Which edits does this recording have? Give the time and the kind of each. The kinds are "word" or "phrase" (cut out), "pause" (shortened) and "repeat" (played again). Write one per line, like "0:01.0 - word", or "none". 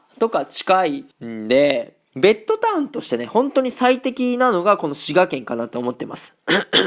0:01.1 - pause